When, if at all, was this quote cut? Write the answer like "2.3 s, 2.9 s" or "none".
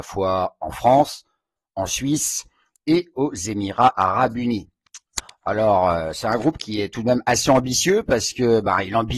none